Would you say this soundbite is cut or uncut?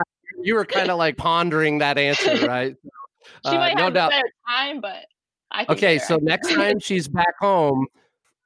cut